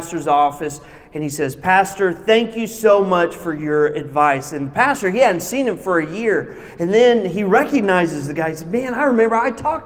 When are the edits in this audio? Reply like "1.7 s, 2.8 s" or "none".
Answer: none